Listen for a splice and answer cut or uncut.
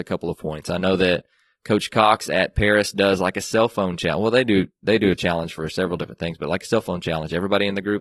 uncut